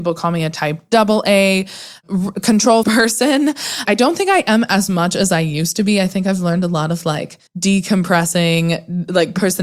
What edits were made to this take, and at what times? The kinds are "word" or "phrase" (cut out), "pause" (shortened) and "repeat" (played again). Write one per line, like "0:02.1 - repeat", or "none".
0:02.8 - phrase
0:03.9 - word
0:07.5 - pause